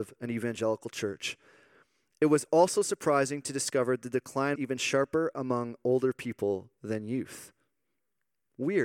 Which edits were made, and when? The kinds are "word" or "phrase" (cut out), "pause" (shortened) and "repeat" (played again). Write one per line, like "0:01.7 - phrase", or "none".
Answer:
0:04.5 - word